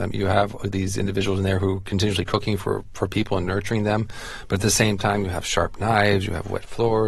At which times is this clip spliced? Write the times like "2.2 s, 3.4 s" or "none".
none

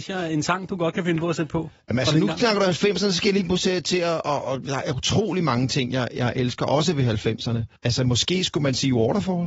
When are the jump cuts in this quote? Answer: 7.8 s

